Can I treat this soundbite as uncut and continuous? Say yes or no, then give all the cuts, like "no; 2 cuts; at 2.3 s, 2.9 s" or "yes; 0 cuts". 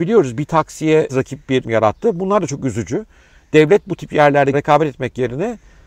no; 3 cuts; at 1.1 s, 1.6 s, 4.5 s